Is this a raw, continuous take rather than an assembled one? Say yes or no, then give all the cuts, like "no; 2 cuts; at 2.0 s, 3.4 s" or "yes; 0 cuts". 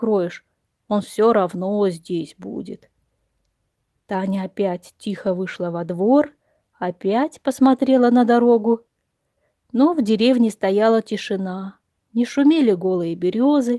yes; 0 cuts